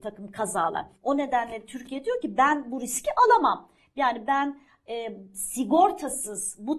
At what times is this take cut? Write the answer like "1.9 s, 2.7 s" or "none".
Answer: 1.0 s